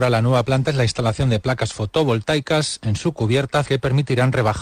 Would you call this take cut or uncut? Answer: uncut